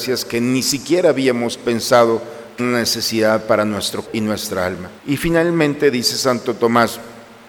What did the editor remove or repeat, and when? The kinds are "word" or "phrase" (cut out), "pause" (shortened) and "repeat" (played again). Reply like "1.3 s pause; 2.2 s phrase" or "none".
2.6 s word; 4.1 s word; 5.0 s pause